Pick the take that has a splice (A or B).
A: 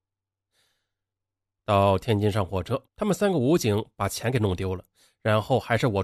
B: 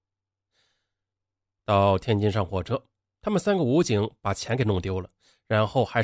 A